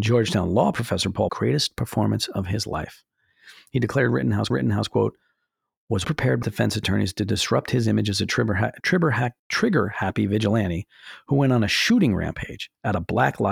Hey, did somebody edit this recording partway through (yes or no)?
yes